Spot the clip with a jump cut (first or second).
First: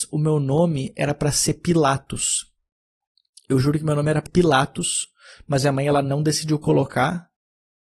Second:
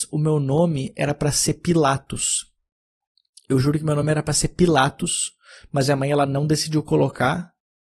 first